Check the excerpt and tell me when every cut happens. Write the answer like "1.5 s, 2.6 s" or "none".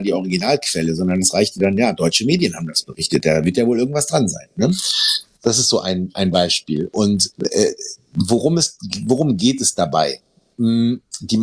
7.3 s